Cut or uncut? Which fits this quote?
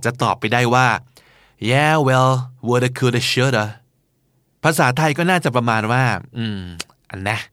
uncut